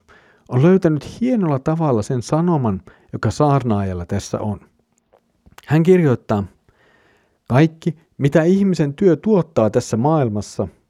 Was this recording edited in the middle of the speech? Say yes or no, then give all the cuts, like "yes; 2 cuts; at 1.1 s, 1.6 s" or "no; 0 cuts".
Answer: yes; 1 cut; at 8.1 s